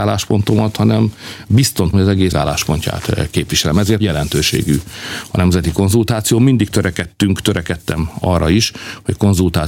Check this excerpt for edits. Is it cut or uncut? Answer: cut